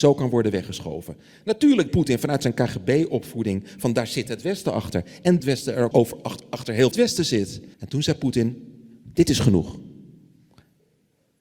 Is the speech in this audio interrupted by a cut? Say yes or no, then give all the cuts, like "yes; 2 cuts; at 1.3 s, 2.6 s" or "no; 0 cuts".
yes; 5 cuts; at 1.9 s, 5.4 s, 5.9 s, 6.9 s, 7.7 s